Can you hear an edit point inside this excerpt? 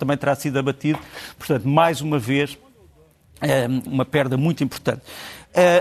yes; 1 cut; at 3.9 s

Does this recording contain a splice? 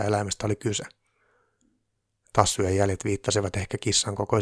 no; 0 cuts

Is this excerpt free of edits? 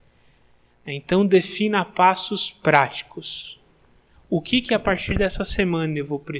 yes; 0 cuts

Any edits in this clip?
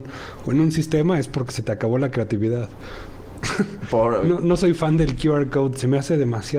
no; 0 cuts

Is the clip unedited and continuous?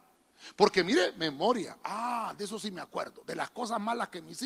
yes; 0 cuts

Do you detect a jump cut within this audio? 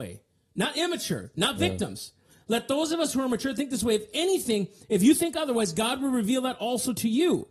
no; 0 cuts

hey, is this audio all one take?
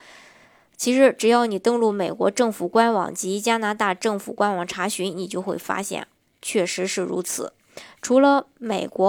yes; 0 cuts

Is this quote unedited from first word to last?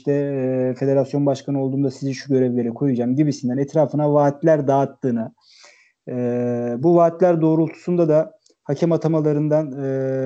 yes; 0 cuts

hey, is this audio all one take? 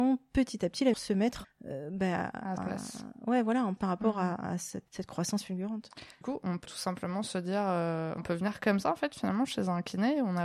no; 8 cuts; at 0.9 s, 1.4 s, 2.6 s, 3.8 s, 4.9 s, 6.2 s, 6.6 s, 8.2 s

